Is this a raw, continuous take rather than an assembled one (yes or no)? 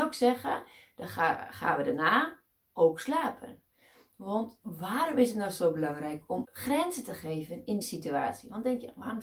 no